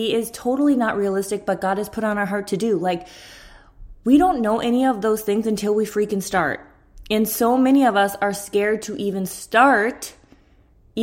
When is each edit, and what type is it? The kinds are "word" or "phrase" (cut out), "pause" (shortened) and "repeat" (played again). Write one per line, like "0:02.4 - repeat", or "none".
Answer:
none